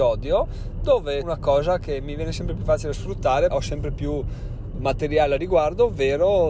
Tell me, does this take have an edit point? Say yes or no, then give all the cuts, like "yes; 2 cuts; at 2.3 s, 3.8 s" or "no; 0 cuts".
yes; 2 cuts; at 1.2 s, 3.5 s